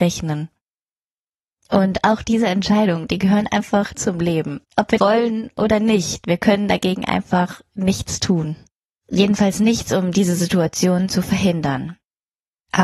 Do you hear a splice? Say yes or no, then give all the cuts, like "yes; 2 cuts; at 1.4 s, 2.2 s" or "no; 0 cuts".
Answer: yes; 3 cuts; at 3.9 s, 4.6 s, 5.0 s